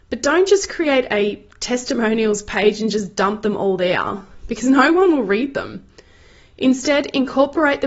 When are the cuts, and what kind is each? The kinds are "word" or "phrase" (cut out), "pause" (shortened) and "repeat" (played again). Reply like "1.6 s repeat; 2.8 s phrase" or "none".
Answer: none